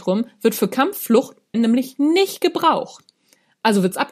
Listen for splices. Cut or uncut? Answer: cut